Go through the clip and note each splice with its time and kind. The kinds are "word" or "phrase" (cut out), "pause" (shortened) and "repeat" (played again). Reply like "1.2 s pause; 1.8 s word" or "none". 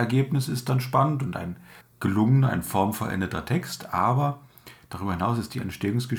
1.8 s pause